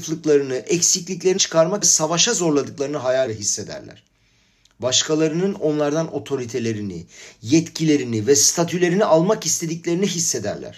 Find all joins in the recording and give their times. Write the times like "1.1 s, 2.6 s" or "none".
1.4 s, 1.8 s, 3.3 s